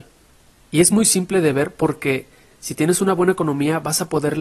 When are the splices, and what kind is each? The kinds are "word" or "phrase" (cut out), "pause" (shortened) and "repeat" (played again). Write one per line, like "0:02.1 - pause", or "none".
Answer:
none

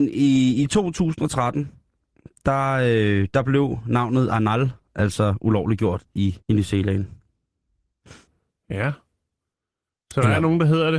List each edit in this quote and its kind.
0:06.4 - pause
0:08.3 - pause

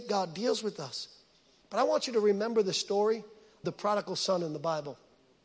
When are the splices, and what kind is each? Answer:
0:03.6 - word

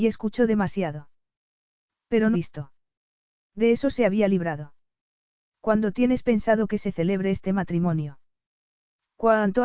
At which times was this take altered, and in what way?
0:02.3 - word

